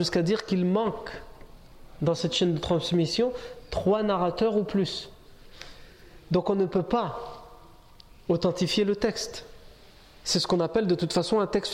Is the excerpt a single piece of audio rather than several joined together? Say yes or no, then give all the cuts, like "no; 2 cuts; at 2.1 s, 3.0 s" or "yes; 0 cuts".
yes; 0 cuts